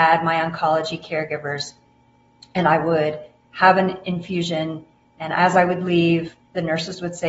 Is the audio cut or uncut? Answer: uncut